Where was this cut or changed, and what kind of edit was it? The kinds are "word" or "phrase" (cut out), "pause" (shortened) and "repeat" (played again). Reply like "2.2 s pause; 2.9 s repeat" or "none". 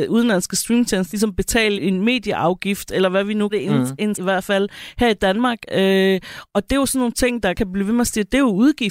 1.1 s word; 1.8 s word; 3.5 s word; 4.1 s word; 7.5 s word